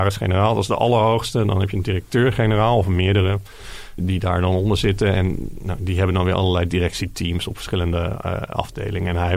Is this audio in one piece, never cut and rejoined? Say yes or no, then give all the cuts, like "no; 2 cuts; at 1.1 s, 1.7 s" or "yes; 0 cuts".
no; 1 cut; at 4.0 s